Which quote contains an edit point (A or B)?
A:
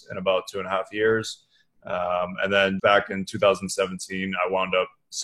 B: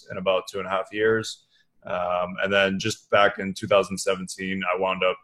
A